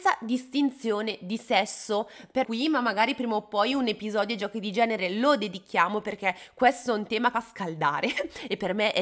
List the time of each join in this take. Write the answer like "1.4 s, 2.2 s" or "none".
2.4 s, 7.3 s